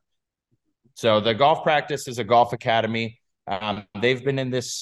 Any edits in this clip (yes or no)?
no